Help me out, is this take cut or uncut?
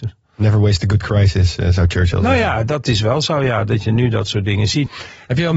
uncut